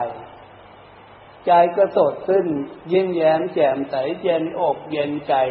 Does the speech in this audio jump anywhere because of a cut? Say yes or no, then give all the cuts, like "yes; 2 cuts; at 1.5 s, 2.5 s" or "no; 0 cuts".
yes; 1 cut; at 2.8 s